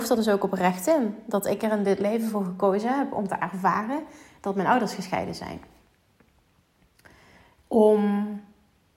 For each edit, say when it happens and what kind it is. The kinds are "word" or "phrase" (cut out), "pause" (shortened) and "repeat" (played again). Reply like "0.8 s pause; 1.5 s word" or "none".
none